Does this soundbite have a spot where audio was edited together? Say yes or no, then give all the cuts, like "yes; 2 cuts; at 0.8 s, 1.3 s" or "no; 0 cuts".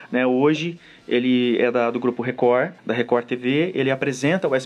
yes; 1 cut; at 2.8 s